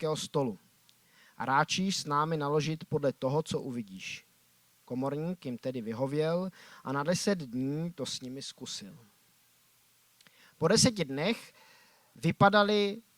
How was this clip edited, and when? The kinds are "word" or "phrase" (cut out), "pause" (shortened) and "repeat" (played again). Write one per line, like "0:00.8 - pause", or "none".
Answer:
none